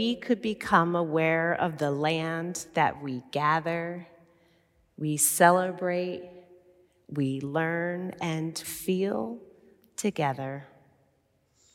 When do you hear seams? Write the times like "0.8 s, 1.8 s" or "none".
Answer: 8.6 s